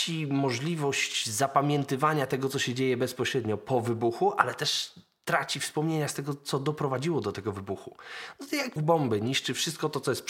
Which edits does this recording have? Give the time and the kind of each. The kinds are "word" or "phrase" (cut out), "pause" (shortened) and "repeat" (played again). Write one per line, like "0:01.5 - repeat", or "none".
0:08.8 - word